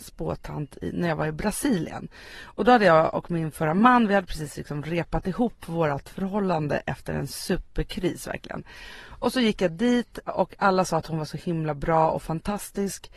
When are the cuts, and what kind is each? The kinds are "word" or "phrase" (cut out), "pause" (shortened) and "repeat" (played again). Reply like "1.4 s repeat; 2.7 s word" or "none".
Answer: 10.3 s word